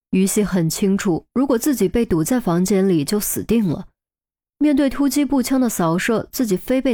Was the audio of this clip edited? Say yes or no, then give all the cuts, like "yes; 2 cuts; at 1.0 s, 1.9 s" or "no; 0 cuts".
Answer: no; 0 cuts